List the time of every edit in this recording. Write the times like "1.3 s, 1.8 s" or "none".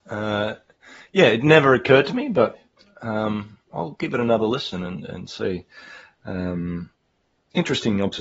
none